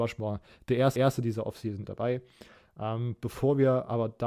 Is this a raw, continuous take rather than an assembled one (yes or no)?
no